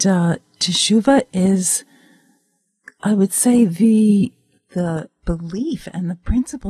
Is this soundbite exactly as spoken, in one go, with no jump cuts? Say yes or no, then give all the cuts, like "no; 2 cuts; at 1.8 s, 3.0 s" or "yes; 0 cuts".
yes; 0 cuts